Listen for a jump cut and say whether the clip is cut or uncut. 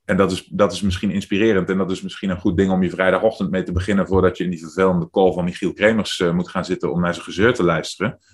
uncut